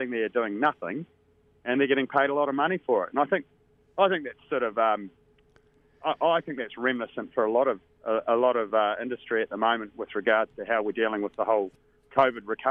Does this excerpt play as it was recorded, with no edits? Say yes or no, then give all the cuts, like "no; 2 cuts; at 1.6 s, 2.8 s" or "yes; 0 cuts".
yes; 0 cuts